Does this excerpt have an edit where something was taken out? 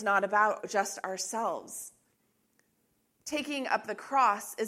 no; 0 cuts

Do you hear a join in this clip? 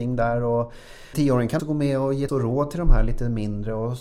yes; 3 cuts; at 1.1 s, 1.6 s, 2.3 s

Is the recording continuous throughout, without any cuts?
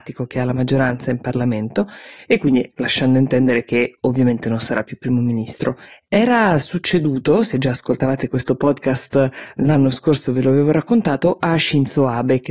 yes; 0 cuts

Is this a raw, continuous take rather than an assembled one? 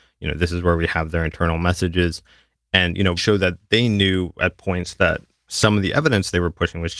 no; 1 cut; at 3.2 s

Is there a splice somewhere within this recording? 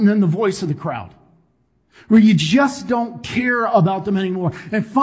no; 0 cuts

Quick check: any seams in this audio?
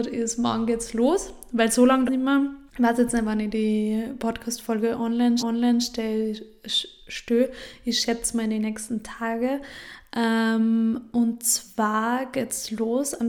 yes; 3 cuts; at 2.1 s, 2.7 s, 5.4 s

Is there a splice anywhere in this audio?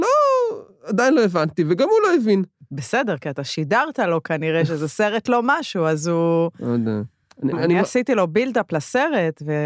yes; 1 cut; at 7.5 s

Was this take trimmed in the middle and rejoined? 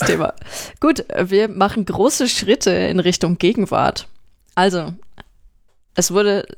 no; 0 cuts

